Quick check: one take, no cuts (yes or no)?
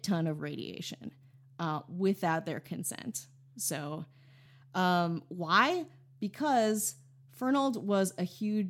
yes